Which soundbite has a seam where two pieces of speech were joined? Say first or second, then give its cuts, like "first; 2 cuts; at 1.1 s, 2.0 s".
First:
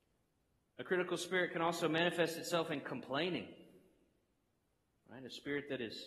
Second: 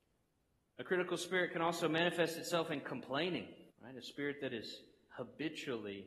second; 1 cut; at 3.7 s